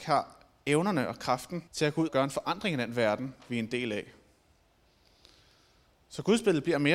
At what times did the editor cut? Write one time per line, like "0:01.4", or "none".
0:01.7
0:02.1